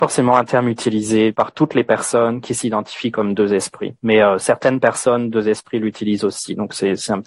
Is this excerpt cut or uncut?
uncut